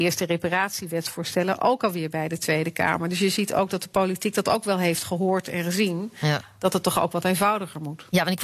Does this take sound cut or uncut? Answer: uncut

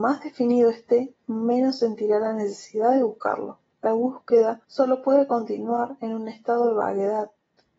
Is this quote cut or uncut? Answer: cut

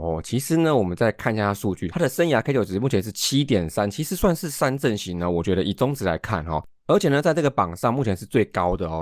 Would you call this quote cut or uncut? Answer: uncut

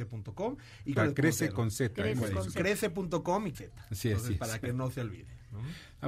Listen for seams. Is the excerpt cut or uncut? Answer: cut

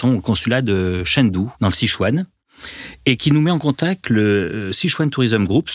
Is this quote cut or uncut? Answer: cut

